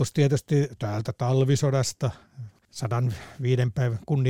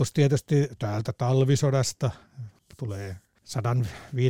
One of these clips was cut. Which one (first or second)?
first